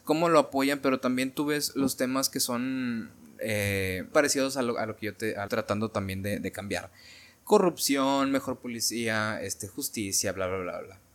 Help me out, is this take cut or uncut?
cut